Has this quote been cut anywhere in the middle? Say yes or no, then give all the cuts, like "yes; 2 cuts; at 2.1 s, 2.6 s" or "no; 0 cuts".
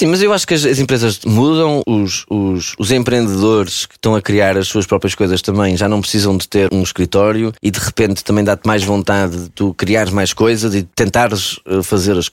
yes; 4 cuts; at 1.8 s, 6.7 s, 7.6 s, 10.9 s